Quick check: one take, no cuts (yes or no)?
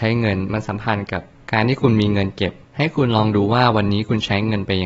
yes